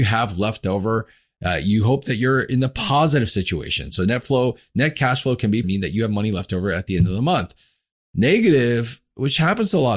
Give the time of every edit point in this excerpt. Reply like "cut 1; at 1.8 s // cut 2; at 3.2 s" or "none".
cut 1; at 5.6 s